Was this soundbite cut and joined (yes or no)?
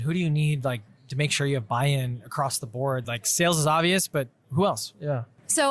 no